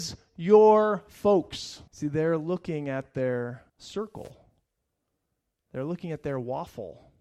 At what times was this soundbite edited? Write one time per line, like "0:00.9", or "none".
0:01.9
0:03.7